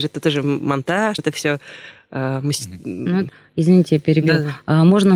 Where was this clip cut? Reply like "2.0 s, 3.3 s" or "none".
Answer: 1.2 s, 3.3 s